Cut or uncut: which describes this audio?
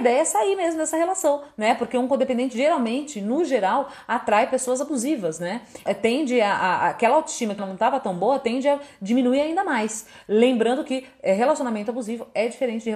cut